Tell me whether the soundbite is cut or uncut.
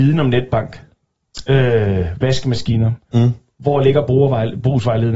uncut